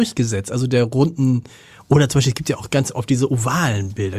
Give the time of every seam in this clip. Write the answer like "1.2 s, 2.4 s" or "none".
none